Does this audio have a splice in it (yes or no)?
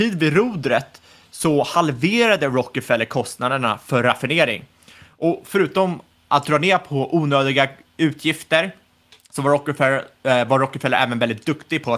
no